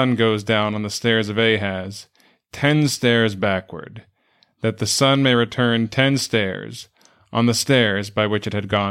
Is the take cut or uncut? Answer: uncut